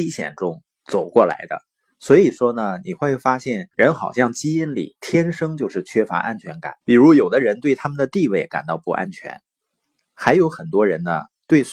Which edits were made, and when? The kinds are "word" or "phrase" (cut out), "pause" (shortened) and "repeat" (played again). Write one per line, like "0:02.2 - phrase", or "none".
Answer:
0:03.7 - pause
0:06.8 - pause